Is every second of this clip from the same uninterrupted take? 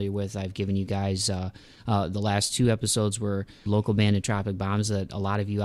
no; 1 cut; at 3.7 s

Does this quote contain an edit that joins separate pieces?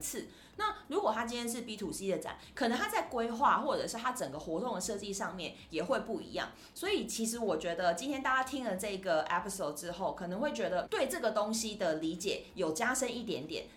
yes; 1 cut; at 10.8 s

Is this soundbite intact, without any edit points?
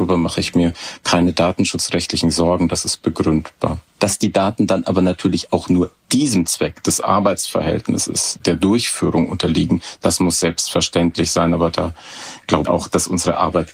no; 2 cuts; at 8.4 s, 12.6 s

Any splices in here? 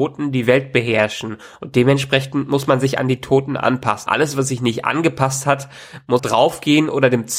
yes; 2 cuts; at 4.1 s, 6.2 s

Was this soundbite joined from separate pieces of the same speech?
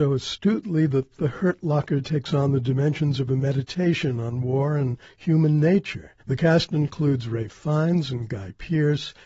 yes; 1 cut; at 6.2 s

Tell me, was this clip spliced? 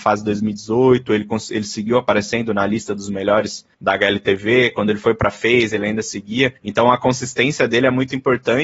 yes; 2 cuts; at 3.7 s, 6.6 s

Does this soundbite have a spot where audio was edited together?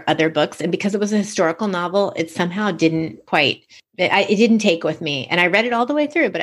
no; 0 cuts

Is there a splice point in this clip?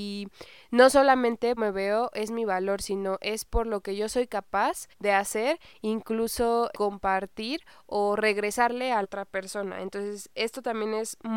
yes; 4 cuts; at 1.6 s, 4.9 s, 6.7 s, 9.0 s

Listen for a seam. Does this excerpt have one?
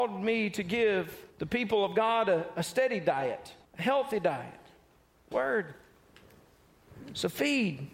yes; 3 cuts; at 1.3 s, 3.6 s, 5.3 s

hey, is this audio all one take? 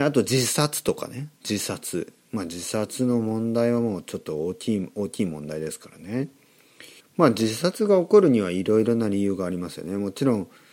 no; 2 cuts; at 1.3 s, 7.0 s

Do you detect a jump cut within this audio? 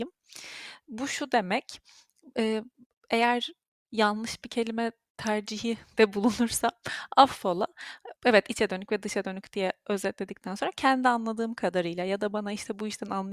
yes; 3 cuts; at 2.9 s, 5.9 s, 8.2 s

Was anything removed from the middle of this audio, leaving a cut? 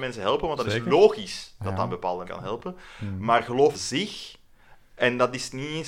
yes; 2 cuts; at 2.2 s, 3.7 s

